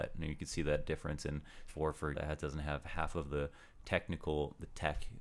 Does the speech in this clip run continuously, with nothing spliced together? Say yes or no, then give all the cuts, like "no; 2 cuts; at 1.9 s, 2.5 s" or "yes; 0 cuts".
no; 2 cuts; at 1.7 s, 2.1 s